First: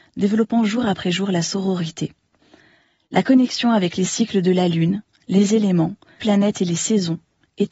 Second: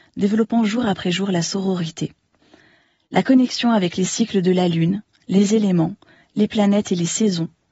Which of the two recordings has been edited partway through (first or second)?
first